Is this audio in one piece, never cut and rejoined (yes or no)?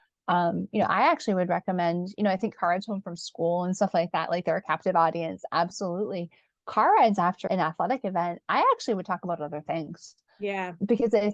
no